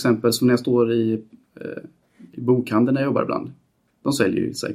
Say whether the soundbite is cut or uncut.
uncut